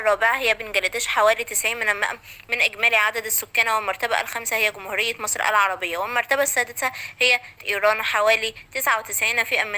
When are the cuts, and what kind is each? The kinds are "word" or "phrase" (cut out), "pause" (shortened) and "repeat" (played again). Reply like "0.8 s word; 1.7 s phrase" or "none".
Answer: 7.6 s word